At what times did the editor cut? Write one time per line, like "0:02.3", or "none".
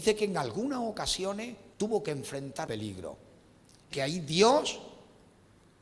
0:01.7
0:02.7
0:03.9